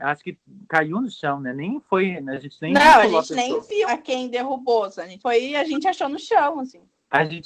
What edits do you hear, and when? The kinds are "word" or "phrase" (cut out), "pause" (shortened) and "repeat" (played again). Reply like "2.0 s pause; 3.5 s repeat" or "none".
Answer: 3.9 s word; 5.2 s phrase